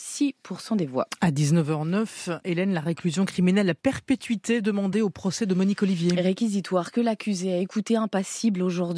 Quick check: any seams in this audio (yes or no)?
no